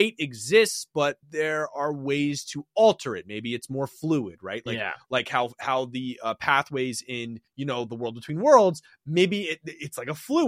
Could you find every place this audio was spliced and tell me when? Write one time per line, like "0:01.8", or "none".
0:01.2
0:07.5